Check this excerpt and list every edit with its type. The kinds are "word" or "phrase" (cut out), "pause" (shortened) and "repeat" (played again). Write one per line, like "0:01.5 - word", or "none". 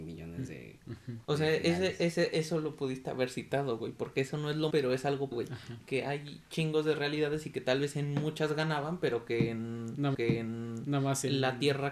0:01.2 - pause
0:04.7 - word
0:05.3 - word
0:10.1 - repeat